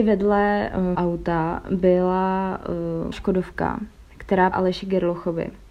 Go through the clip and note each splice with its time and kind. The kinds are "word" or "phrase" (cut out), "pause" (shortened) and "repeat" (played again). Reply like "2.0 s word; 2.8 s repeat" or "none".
0.9 s word; 3.1 s word; 4.5 s word